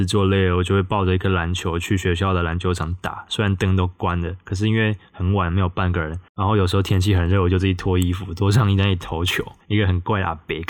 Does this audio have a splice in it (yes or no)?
yes